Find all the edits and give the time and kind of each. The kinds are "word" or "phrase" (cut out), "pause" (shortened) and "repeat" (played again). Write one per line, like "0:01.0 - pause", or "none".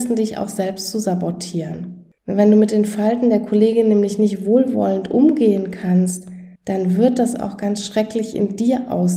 0:02.2 - pause
0:06.6 - pause